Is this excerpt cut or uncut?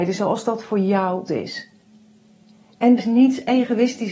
cut